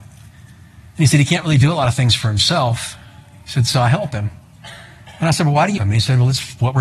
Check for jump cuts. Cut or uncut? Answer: cut